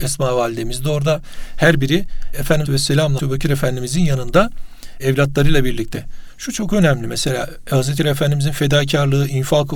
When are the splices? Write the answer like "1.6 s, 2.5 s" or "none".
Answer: 2.7 s, 3.2 s, 8.0 s